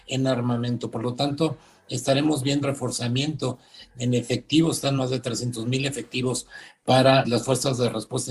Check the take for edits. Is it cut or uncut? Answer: cut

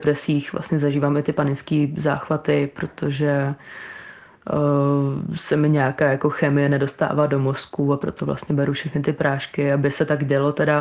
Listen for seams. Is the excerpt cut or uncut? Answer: uncut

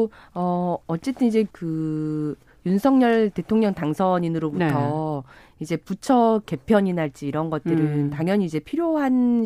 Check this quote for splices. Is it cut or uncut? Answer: cut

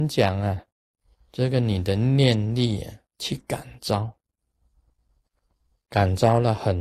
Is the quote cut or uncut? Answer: uncut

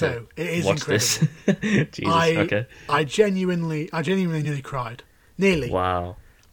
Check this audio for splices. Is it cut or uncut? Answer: uncut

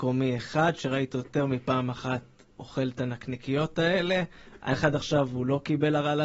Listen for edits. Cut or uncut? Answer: cut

